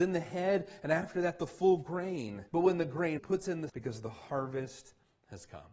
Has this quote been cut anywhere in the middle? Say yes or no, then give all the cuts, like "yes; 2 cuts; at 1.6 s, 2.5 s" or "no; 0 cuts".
yes; 3 cuts; at 2.5 s, 3.2 s, 3.7 s